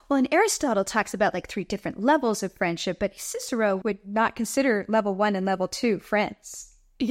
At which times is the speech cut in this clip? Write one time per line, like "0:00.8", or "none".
none